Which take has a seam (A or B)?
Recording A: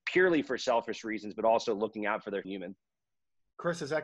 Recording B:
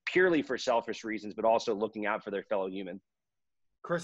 A